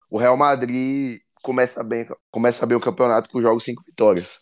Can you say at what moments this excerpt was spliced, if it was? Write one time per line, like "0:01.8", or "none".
0:02.2
0:03.3

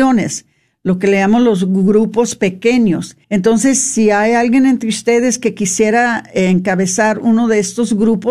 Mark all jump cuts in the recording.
0:03.2

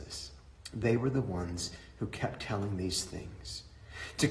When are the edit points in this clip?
none

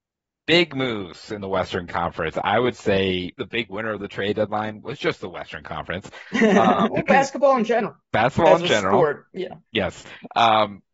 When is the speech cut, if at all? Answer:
0:03.4
0:06.9
0:08.0
0:09.7

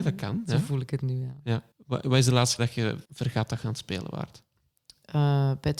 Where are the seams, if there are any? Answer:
0:01.7
0:02.6
0:03.0

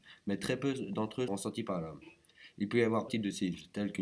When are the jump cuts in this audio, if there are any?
0:01.3
0:03.1

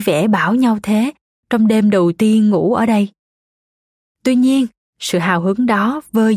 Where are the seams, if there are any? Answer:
none

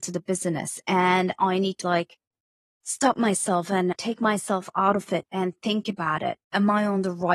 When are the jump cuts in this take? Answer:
0:01.8
0:03.9

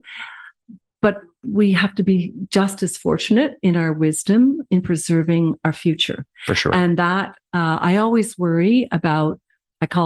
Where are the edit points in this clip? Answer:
none

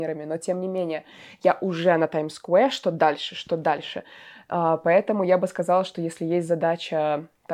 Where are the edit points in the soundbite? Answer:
none

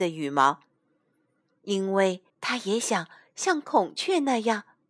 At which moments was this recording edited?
0:02.3

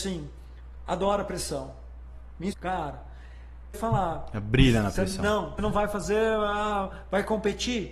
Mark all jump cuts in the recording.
0:02.5
0:03.7
0:05.6

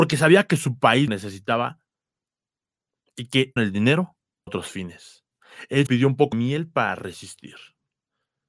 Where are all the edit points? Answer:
0:01.1
0:03.6
0:04.5
0:05.9
0:06.3

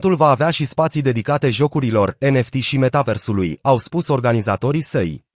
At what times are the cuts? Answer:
none

